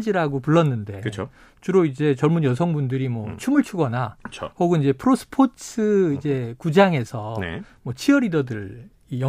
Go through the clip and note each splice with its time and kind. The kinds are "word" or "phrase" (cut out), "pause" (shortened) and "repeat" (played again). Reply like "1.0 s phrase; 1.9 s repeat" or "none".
none